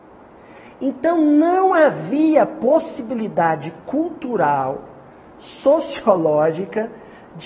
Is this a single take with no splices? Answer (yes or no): yes